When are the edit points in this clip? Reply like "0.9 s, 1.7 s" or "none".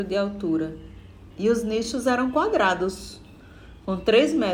1.3 s

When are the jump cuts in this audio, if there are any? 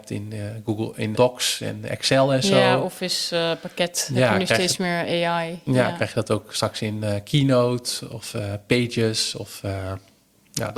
1.1 s

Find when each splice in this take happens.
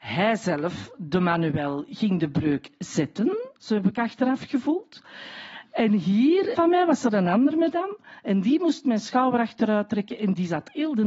3.6 s, 6.5 s

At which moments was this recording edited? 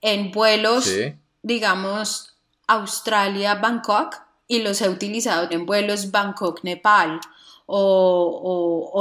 5.5 s

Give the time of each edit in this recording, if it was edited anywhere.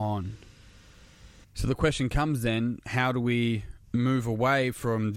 1.4 s, 3.8 s

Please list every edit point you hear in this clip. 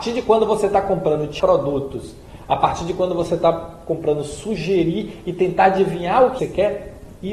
1.4 s, 6.4 s

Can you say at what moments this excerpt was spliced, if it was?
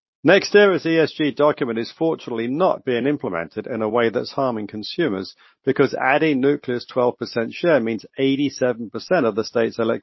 none

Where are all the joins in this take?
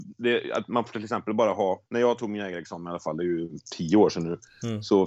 1.9 s

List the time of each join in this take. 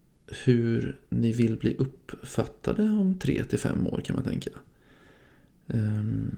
none

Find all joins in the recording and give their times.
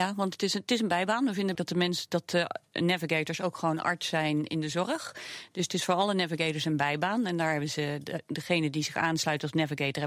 1.5 s

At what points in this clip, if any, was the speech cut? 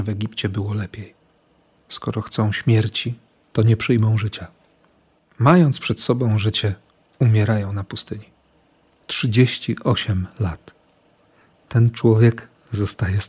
none

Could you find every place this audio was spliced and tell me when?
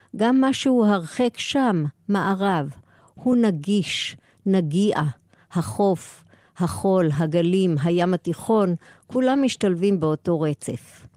none

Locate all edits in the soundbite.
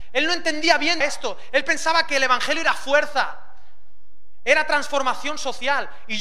1.0 s

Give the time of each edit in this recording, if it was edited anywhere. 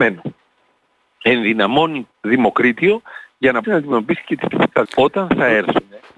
2.1 s, 3.6 s, 4.5 s, 4.8 s

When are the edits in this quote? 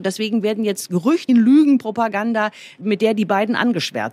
1.3 s

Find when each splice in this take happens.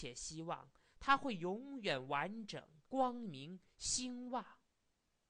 2.8 s

